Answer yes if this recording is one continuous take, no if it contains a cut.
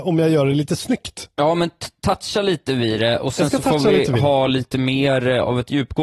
yes